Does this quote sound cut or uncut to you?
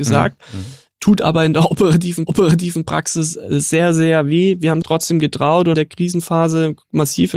cut